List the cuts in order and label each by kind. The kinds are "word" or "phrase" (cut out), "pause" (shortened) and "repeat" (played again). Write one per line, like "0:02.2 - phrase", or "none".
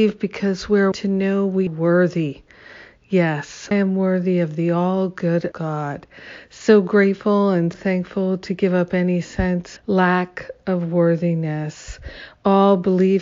0:00.9 - word
0:01.7 - word
0:03.7 - word
0:05.5 - word
0:07.7 - word
0:09.8 - word